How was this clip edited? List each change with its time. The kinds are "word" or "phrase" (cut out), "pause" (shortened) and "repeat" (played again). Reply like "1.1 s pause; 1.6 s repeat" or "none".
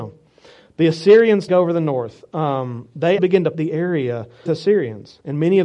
1.5 s word; 3.2 s word; 3.5 s word; 4.5 s word